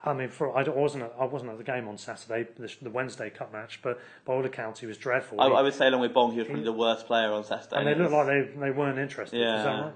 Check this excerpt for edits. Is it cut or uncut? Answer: uncut